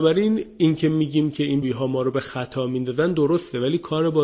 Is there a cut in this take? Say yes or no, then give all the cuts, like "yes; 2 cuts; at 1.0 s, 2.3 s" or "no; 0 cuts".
yes; 1 cut; at 1.6 s